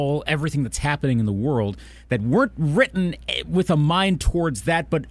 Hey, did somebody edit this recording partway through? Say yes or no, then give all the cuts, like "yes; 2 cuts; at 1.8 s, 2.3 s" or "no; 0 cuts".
no; 0 cuts